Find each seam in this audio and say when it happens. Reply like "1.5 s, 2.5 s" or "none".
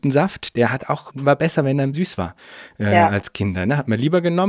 1.1 s, 1.9 s